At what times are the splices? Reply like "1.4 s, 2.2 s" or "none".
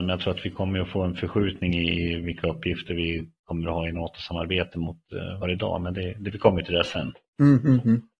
5.4 s